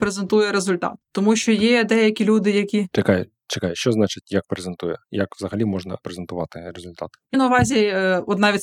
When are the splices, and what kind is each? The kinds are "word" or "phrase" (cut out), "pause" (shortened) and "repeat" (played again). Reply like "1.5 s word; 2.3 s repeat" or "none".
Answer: 6.0 s word; 7.3 s word